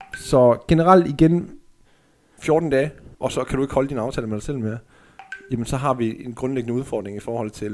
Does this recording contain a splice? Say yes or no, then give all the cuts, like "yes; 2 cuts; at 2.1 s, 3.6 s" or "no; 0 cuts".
yes; 2 cuts; at 2.4 s, 3.1 s